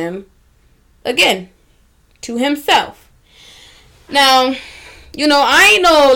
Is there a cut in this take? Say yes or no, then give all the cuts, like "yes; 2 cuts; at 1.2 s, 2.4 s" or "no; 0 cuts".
no; 0 cuts